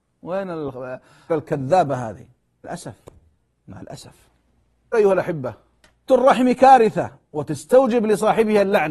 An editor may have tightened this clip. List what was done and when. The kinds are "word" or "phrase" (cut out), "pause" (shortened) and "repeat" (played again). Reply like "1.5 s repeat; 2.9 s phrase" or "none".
1.3 s word; 2.6 s word; 4.9 s word; 6.1 s word